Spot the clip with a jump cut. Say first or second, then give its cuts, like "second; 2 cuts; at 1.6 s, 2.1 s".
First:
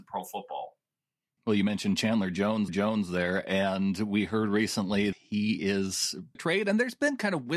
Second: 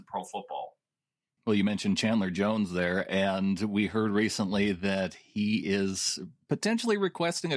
first; 3 cuts; at 2.7 s, 5.1 s, 6.4 s